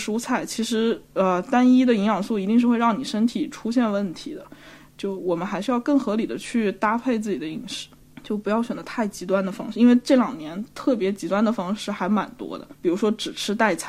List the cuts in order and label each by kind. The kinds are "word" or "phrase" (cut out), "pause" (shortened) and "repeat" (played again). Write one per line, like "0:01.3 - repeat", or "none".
none